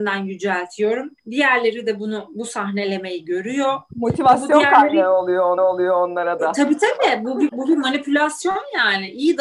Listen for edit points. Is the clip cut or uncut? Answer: cut